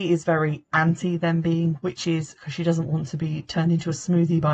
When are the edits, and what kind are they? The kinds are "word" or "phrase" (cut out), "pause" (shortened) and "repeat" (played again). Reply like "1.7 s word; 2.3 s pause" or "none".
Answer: none